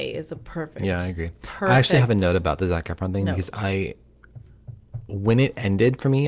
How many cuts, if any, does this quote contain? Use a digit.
0